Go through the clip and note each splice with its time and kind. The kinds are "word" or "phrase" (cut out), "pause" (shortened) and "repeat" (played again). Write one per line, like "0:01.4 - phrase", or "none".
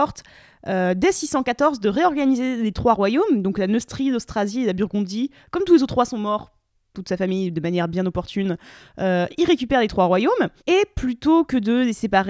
0:10.6 - pause